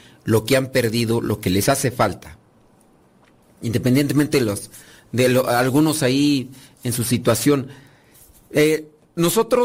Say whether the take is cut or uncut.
uncut